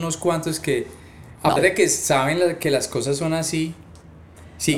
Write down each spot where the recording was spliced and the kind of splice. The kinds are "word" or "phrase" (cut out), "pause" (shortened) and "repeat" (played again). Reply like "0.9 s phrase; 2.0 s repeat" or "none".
1.6 s word